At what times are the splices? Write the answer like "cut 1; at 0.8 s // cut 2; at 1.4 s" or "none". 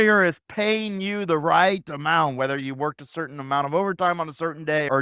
none

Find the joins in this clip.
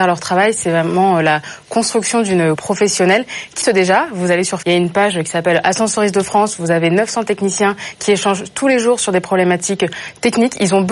cut 1; at 2.6 s // cut 2; at 3.6 s // cut 3; at 4.6 s

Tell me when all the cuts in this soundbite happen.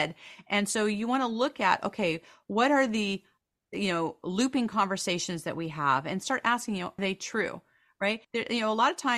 cut 1; at 7.0 s // cut 2; at 8.2 s

